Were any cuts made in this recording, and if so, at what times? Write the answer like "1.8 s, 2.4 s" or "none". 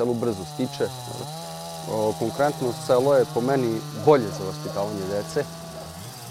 none